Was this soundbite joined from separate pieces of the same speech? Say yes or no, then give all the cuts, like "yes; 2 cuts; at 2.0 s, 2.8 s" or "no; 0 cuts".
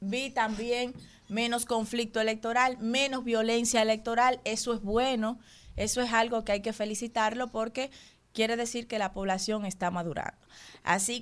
no; 0 cuts